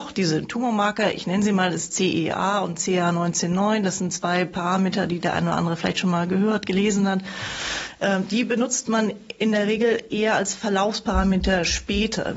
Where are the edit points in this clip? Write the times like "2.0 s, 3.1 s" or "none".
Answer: none